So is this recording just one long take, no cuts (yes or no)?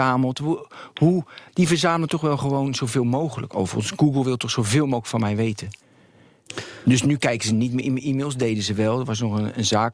no